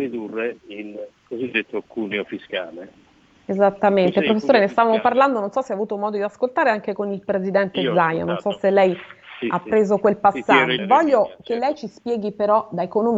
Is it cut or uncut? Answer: cut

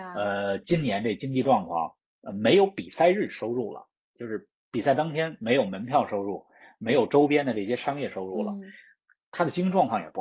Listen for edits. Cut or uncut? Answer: uncut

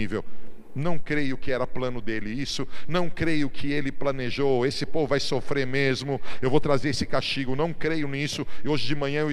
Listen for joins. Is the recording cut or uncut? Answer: uncut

